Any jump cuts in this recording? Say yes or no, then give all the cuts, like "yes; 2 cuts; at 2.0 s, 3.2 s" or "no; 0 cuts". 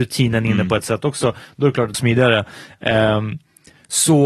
yes; 1 cut; at 1.9 s